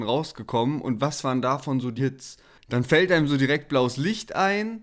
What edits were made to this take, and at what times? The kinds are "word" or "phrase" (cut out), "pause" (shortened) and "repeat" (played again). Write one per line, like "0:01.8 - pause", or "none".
0:02.0 - word